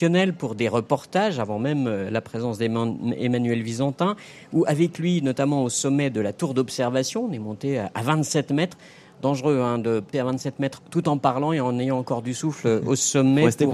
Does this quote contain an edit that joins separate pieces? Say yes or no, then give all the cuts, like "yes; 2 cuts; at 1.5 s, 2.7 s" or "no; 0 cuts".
yes; 1 cut; at 10.1 s